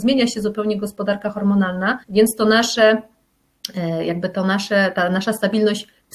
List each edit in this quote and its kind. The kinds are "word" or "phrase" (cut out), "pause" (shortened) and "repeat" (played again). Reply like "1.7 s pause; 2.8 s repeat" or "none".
2.0 s pause